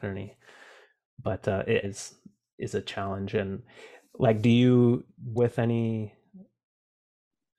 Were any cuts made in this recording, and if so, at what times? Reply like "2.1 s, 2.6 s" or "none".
1.8 s, 5.4 s